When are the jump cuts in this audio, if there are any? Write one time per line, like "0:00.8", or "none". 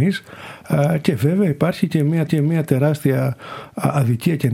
0:02.3

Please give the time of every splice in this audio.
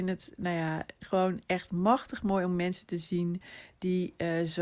none

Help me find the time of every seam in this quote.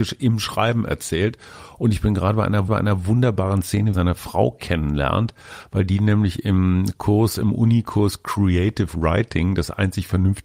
0:02.7
0:03.9

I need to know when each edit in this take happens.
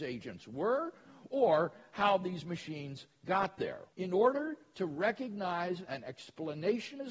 0:03.9

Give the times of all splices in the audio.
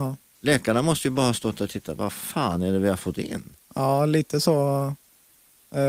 none

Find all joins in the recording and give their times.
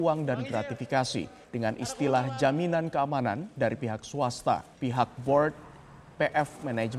0:01.4
0:04.7

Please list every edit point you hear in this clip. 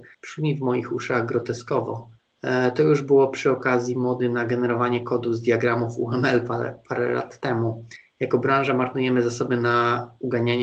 none

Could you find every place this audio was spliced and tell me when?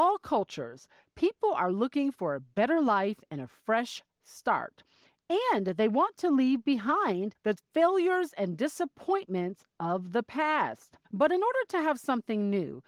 0:07.4
0:11.0

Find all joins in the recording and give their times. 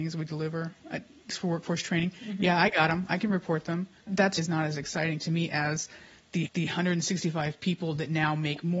0:01.3
0:04.0
0:04.4
0:06.5

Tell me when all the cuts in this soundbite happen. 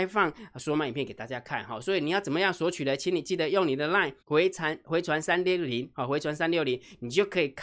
0:04.2

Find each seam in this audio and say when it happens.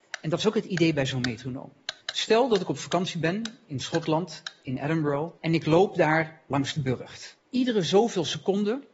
0:02.0
0:05.4
0:07.5

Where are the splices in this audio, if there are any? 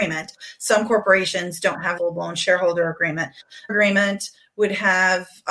0:02.0
0:03.7

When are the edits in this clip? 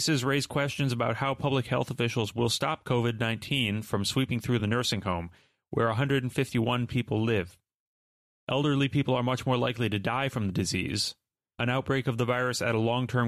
none

